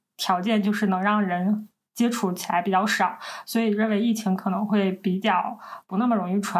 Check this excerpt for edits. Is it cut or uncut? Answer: uncut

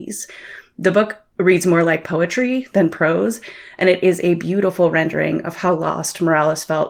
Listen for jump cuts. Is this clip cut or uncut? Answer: uncut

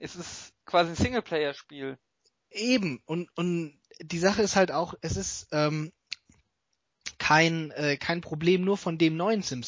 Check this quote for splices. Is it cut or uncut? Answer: uncut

